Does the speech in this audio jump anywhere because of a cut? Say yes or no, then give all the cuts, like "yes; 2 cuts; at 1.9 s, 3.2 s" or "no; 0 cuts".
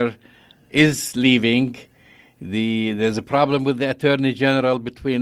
no; 0 cuts